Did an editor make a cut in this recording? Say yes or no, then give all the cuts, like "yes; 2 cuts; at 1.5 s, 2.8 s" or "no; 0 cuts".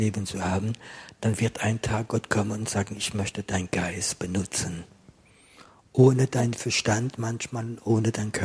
no; 0 cuts